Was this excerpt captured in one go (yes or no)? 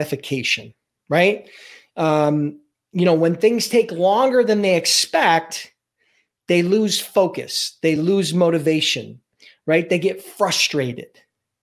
yes